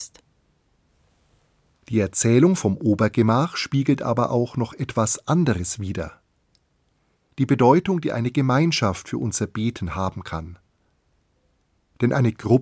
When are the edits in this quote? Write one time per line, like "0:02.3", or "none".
none